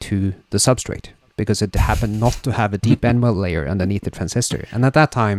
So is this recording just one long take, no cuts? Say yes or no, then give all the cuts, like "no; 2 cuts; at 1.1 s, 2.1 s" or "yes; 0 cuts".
yes; 0 cuts